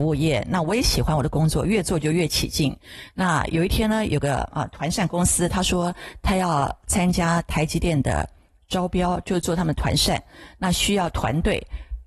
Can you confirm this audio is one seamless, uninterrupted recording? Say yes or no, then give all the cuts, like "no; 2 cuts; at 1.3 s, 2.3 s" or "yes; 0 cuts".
yes; 0 cuts